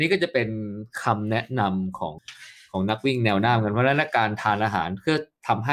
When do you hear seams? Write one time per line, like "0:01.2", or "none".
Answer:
none